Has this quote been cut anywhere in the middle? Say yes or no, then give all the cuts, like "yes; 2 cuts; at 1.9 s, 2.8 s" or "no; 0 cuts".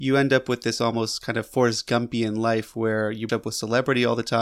yes; 1 cut; at 3.3 s